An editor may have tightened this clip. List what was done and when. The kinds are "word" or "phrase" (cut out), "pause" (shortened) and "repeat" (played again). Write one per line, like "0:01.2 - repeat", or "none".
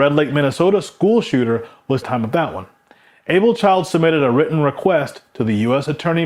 0:02.0 - phrase